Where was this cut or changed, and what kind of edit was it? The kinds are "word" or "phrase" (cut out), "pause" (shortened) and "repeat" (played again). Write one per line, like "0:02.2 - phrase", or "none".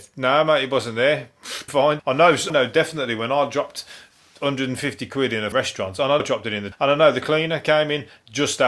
0:01.7 - word
0:02.0 - word
0:02.5 - word
0:05.5 - word
0:06.2 - word
0:06.7 - word